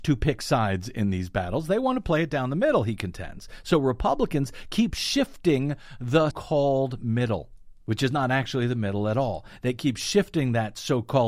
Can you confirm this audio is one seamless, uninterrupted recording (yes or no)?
no